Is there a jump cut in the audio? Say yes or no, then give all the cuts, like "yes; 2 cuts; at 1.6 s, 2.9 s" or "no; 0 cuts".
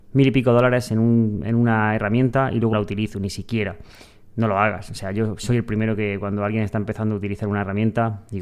yes; 1 cut; at 2.7 s